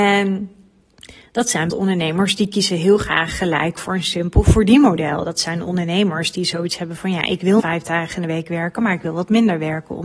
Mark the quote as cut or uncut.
cut